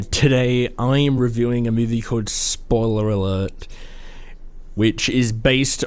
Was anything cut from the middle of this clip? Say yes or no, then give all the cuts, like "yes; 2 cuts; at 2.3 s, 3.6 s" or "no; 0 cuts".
no; 0 cuts